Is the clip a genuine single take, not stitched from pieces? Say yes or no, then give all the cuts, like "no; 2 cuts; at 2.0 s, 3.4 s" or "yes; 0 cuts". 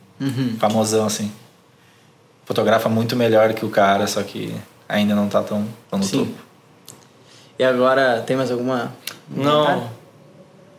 no; 1 cut; at 5.8 s